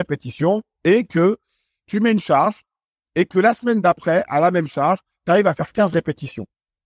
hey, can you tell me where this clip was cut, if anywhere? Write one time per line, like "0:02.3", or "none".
none